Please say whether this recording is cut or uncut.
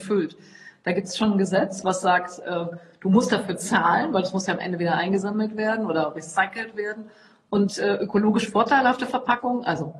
uncut